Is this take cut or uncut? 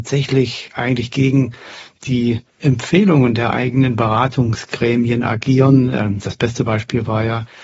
cut